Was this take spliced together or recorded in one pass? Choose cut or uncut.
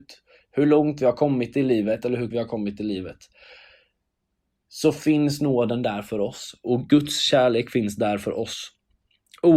cut